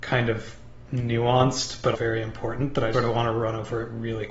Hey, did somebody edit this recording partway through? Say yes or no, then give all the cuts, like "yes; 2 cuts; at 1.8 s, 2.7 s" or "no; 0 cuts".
yes; 2 cuts; at 1.9 s, 2.9 s